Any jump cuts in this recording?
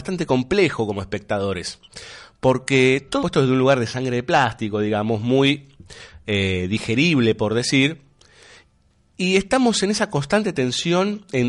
yes; 1 cut; at 3.2 s

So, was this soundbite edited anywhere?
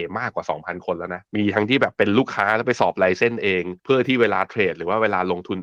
yes; 2 cuts; at 1.3 s, 3.8 s

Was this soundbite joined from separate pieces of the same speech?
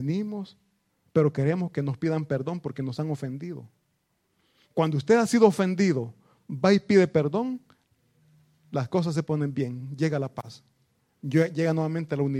no; 0 cuts

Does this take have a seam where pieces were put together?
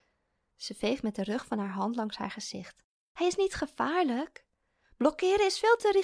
no; 0 cuts

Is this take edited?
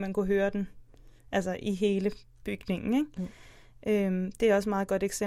no; 0 cuts

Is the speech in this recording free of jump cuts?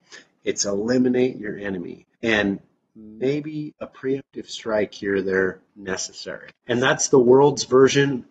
no; 4 cuts; at 2.2 s, 3.8 s, 5.7 s, 6.6 s

